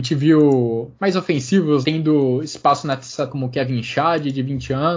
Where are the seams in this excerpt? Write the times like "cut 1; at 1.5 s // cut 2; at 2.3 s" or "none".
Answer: cut 1; at 1.0 s // cut 2; at 1.8 s // cut 3; at 3.3 s